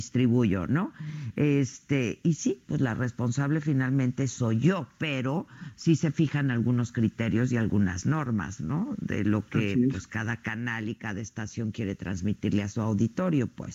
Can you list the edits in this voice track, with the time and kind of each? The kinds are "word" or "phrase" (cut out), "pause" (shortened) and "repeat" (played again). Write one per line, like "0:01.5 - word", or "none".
none